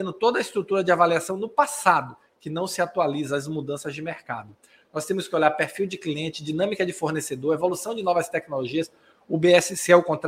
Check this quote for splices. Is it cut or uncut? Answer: uncut